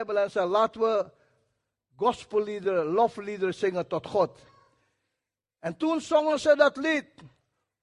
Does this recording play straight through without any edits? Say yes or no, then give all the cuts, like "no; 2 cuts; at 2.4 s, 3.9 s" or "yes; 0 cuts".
yes; 0 cuts